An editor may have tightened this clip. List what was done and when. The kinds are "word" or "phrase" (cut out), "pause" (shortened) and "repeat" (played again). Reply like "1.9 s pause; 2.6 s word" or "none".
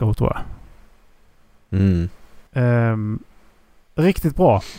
2.5 s pause